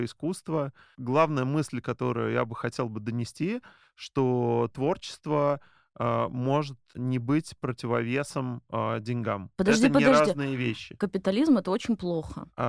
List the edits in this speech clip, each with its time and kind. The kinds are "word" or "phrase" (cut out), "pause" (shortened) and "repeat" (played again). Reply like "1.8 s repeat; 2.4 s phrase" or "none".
none